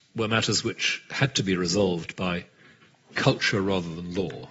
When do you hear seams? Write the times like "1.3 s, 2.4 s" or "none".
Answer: none